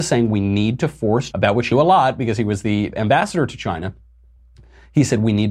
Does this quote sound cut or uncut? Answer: cut